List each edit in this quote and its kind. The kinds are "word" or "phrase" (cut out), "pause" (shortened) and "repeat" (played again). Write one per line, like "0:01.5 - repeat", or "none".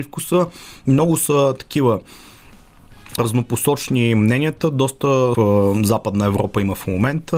0:03.2 - word
0:05.3 - phrase